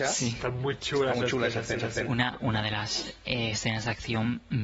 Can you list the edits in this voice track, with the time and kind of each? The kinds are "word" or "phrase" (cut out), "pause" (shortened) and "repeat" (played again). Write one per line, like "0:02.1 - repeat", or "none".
0:01.8 - repeat